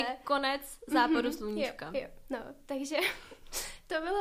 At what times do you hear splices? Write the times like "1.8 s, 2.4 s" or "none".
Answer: none